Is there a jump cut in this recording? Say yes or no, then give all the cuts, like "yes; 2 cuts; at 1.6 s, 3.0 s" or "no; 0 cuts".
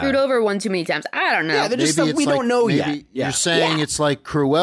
no; 0 cuts